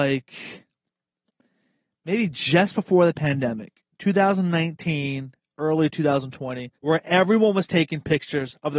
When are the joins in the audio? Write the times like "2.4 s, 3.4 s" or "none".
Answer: 3.9 s, 6.8 s